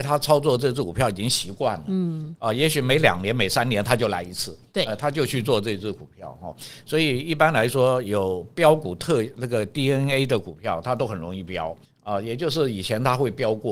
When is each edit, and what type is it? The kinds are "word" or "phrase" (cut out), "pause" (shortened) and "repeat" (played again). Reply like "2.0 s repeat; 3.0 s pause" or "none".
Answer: 11.8 s pause